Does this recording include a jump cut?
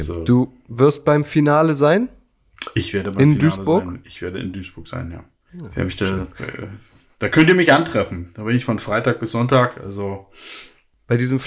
no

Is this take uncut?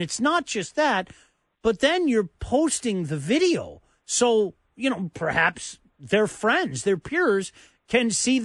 yes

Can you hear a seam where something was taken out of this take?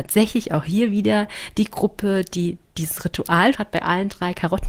yes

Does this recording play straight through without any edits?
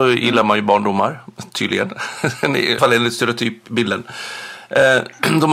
no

